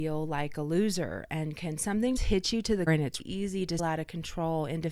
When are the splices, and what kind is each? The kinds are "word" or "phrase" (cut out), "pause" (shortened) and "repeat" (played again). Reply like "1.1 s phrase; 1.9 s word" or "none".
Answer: 2.2 s word; 2.9 s word; 3.2 s word; 3.8 s word